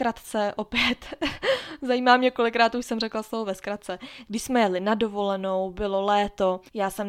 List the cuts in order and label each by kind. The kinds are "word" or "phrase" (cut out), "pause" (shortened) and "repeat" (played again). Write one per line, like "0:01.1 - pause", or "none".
none